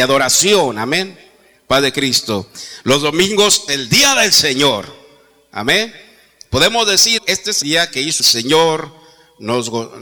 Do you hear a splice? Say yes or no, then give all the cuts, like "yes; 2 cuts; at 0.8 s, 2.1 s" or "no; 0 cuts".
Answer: yes; 4 cuts; at 3.7 s, 7.2 s, 7.6 s, 8.2 s